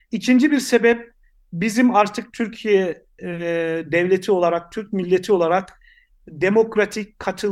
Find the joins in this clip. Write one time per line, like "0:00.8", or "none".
none

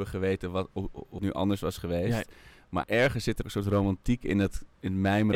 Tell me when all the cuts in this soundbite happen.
0:01.2
0:02.8
0:03.4

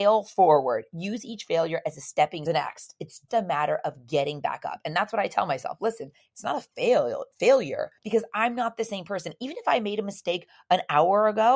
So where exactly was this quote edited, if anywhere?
0:02.5
0:03.3
0:08.0

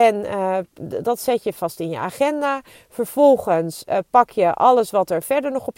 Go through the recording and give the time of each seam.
none

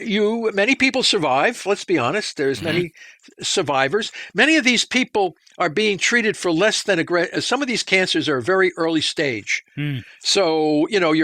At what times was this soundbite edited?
none

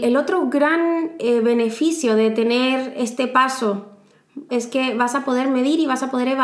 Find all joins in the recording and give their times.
0:04.5

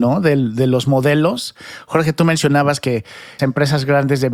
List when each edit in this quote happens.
0:03.4

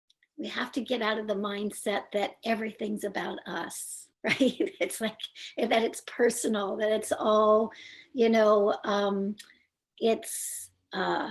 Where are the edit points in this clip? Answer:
0:04.1

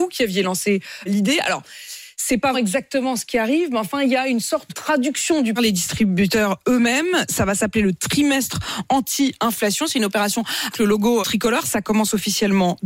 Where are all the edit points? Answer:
0:01.1
0:02.5
0:04.7
0:05.6
0:10.7
0:11.2

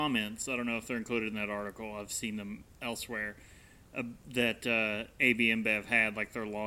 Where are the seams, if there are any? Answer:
none

